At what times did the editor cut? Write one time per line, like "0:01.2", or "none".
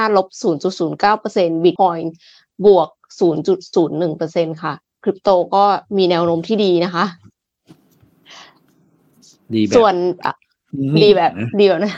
0:01.8